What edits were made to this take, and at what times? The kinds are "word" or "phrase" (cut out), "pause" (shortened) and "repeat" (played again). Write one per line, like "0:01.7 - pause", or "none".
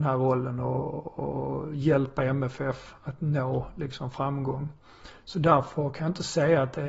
0:03.0 - pause